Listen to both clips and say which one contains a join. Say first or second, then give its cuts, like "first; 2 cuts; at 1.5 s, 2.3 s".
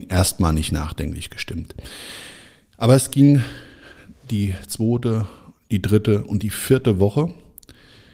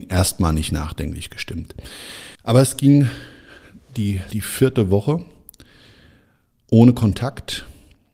second; 2 cuts; at 2.3 s, 4.3 s